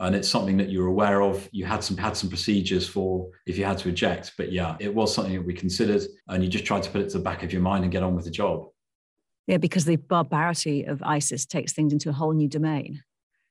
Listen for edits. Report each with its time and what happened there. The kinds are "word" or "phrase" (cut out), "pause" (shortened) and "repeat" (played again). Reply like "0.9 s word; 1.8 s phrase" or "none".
2.0 s repeat; 4.8 s word; 6.2 s pause